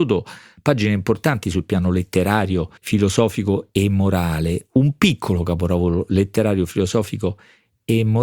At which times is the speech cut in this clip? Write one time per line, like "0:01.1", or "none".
0:02.8